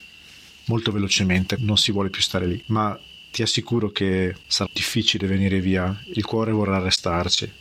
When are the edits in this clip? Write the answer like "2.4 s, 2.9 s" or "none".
1.6 s, 4.7 s